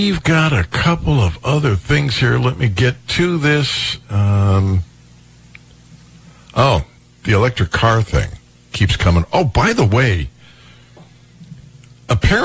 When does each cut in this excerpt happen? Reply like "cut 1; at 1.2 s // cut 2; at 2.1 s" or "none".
none